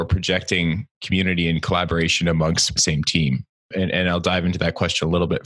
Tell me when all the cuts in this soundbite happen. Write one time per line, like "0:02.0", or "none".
0:00.9
0:02.8